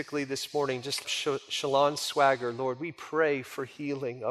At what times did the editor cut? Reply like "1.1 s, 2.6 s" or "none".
1.0 s